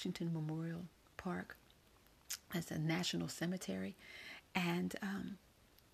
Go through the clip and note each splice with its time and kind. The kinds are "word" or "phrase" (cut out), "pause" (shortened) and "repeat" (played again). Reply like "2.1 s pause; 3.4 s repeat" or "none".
none